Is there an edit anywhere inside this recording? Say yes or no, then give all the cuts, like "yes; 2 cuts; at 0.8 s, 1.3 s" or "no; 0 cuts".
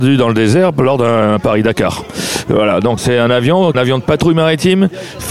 yes; 2 cuts; at 3.0 s, 3.7 s